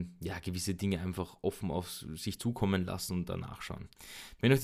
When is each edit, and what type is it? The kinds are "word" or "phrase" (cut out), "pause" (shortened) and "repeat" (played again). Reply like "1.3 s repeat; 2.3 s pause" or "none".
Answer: none